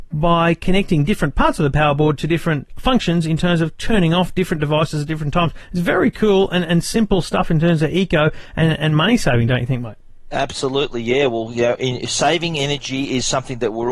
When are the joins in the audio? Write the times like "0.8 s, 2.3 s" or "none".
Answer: none